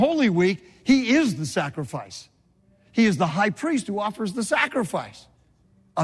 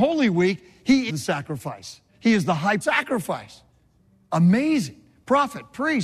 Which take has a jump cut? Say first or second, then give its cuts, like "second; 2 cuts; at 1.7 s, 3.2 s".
second; 3 cuts; at 1.1 s, 2.1 s, 2.8 s